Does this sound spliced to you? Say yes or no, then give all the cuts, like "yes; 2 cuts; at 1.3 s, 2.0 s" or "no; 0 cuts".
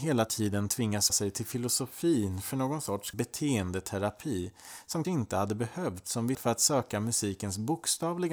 yes; 4 cuts; at 1.1 s, 3.1 s, 5.0 s, 6.3 s